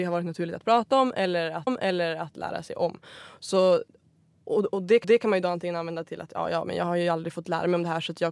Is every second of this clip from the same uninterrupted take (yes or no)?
no